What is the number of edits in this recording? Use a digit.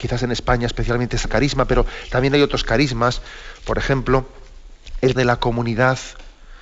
2